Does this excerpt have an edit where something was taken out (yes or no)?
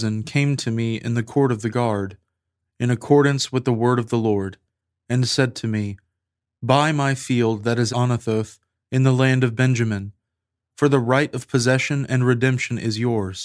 yes